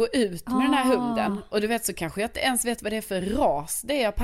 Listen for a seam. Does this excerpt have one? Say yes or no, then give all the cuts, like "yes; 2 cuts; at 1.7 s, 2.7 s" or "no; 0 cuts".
no; 0 cuts